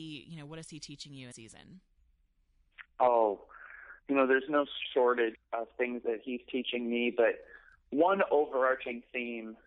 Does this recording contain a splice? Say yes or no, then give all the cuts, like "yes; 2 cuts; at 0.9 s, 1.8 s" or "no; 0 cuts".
yes; 4 cuts; at 1.3 s, 2.9 s, 5.3 s, 6.0 s